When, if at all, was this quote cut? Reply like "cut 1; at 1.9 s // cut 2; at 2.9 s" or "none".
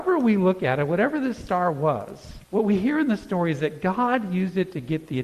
cut 1; at 2.4 s